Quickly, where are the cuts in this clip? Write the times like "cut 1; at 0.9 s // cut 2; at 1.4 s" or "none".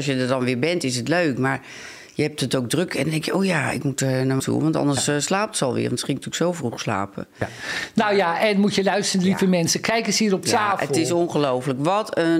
cut 1; at 4.4 s